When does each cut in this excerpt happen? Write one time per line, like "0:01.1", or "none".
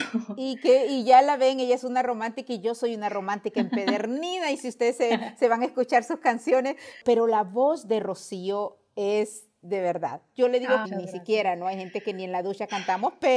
0:10.8